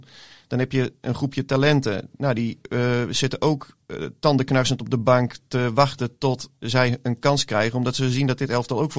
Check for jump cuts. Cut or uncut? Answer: uncut